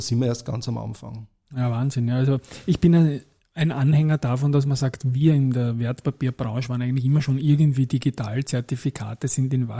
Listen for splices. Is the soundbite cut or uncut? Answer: uncut